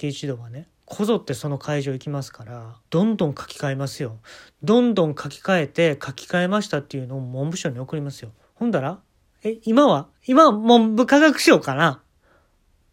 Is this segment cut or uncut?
cut